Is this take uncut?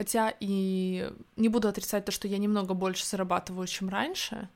yes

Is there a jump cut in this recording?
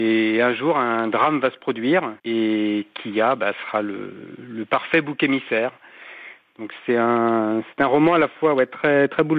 yes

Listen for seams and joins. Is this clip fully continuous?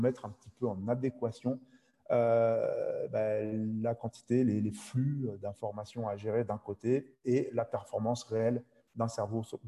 yes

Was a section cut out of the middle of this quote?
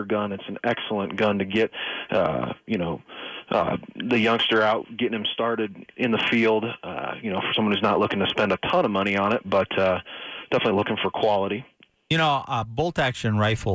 no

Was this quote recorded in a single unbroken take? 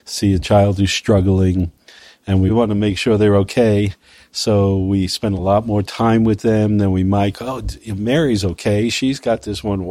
yes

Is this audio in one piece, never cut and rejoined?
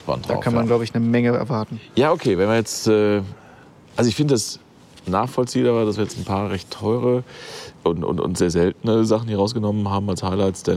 yes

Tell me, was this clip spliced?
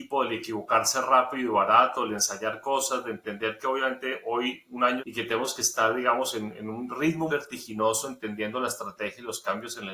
yes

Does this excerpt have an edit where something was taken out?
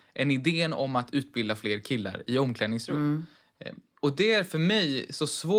no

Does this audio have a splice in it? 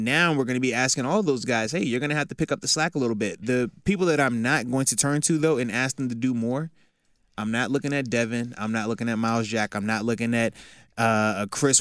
no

